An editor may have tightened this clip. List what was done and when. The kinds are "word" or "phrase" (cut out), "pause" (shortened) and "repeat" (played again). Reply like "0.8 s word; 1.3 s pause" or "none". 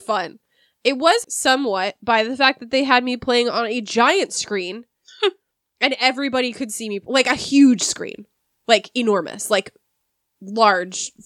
1.2 s word